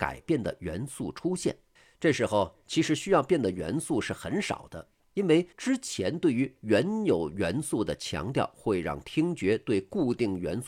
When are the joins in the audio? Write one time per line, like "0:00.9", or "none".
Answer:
0:01.8
0:05.5

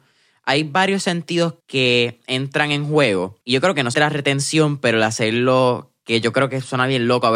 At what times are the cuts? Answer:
0:01.6
0:03.4
0:03.9

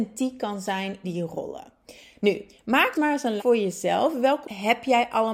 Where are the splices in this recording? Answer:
0:01.0
0:02.9
0:03.4
0:04.4

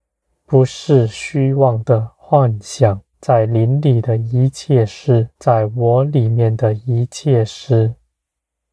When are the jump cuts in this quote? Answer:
0:03.1
0:05.4

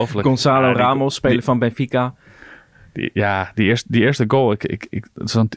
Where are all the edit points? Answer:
none

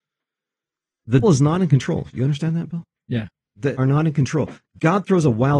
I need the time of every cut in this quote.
0:01.2
0:03.7

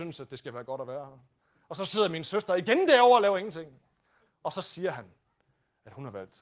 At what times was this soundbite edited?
none

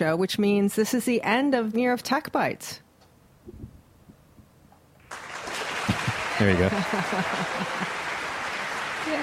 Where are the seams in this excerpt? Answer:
0:01.7

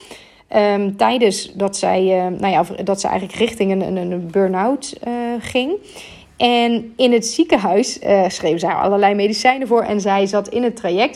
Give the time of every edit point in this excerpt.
none

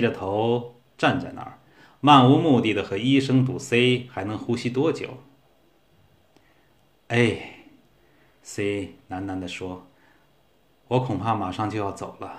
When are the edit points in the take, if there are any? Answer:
none

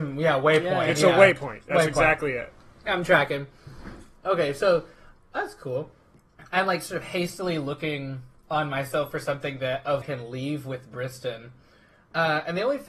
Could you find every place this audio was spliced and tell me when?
0:08.4
0:10.0

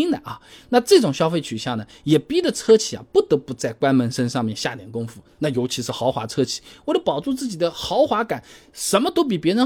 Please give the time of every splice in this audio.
none

